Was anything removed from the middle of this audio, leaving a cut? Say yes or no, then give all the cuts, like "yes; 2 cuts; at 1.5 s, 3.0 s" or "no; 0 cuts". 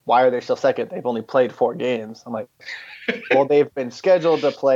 no; 0 cuts